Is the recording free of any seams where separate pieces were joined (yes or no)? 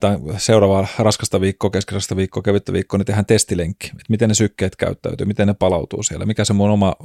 yes